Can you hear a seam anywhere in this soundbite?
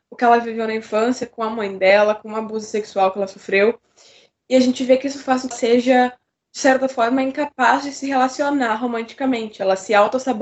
yes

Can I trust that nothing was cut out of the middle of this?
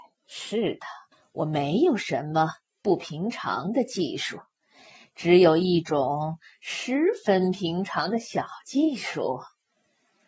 no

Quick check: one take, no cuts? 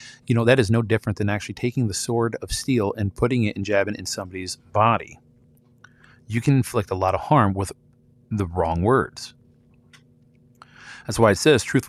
yes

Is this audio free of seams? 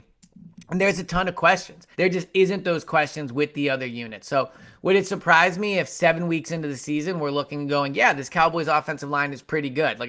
no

